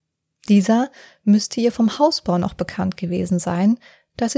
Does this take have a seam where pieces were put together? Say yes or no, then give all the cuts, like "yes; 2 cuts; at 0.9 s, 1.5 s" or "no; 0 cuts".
no; 0 cuts